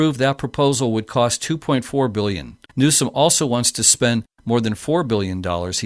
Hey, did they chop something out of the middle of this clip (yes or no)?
yes